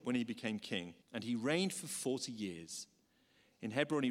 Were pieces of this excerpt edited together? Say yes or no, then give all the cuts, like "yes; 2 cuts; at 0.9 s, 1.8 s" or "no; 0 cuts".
yes; 1 cut; at 1.0 s